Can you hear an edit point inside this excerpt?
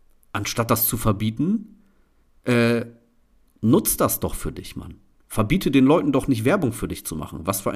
no; 0 cuts

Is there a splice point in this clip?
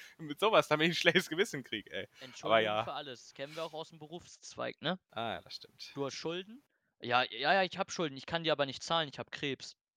no; 0 cuts

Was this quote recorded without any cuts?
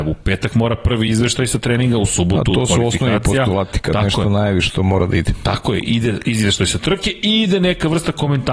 yes; 0 cuts

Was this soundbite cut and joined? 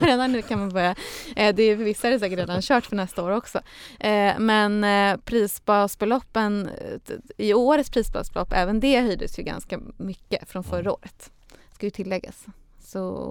no; 0 cuts

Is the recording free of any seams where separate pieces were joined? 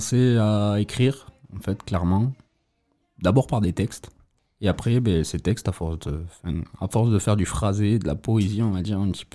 yes; 0 cuts

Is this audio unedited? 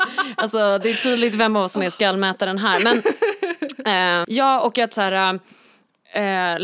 no; 1 cut; at 4.2 s

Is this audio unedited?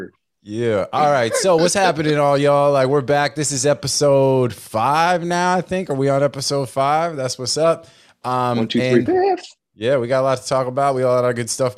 no; 1 cut; at 9.1 s

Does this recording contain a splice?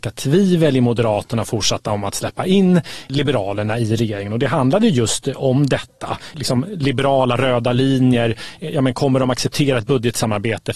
no; 0 cuts

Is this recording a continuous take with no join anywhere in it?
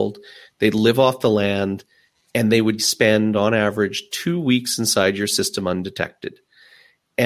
no; 1 cut; at 2.8 s

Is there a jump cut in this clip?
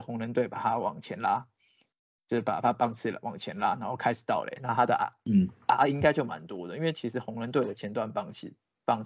no; 0 cuts

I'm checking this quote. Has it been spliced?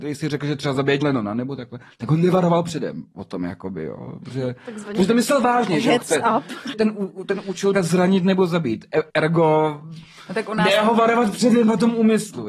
yes; 4 cuts; at 1.0 s, 6.7 s, 7.7 s, 9.1 s

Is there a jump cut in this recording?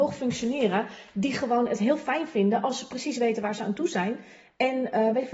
no; 0 cuts

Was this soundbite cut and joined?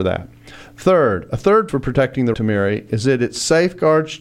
yes; 2 cuts; at 1.7 s, 2.3 s

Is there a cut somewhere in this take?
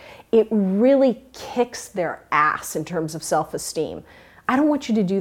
no; 0 cuts

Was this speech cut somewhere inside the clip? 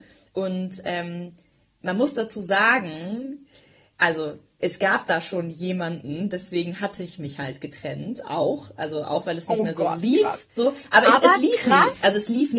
no; 0 cuts

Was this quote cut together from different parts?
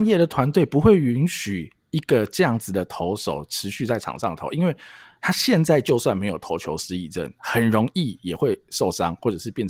no; 0 cuts

